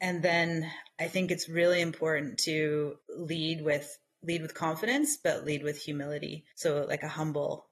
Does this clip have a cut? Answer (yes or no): yes